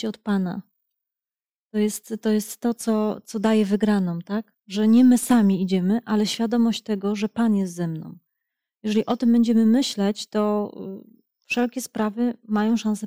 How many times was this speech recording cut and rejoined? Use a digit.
1